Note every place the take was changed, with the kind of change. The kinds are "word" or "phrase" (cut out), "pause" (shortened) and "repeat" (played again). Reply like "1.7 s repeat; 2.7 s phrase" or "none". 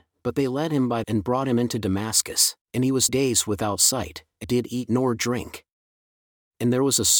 1.0 s phrase; 2.6 s pause; 3.1 s word; 4.4 s word

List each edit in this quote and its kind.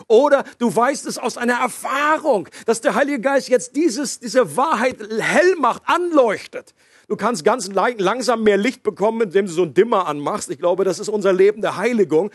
none

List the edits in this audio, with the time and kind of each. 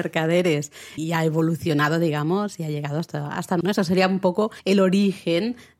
1.0 s word; 3.6 s phrase; 4.6 s pause

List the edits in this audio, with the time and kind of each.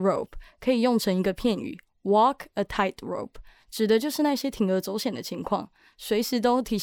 none

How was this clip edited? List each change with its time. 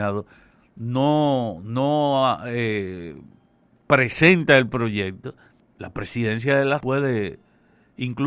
5.6 s pause; 6.8 s word

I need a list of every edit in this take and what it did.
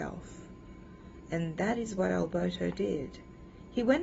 none

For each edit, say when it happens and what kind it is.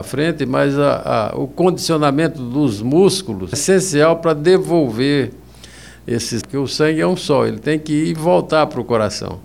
3.5 s word; 6.4 s phrase

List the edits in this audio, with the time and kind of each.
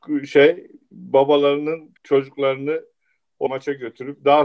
2.0 s pause; 3.5 s word

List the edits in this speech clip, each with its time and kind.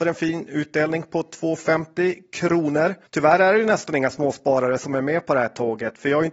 3.1 s pause

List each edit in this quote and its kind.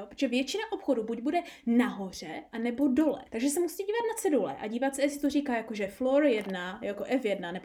3.3 s pause

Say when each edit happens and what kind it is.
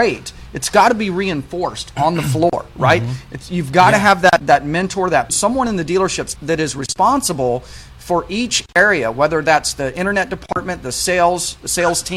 4.4 s word; 5.3 s word; 6.4 s word

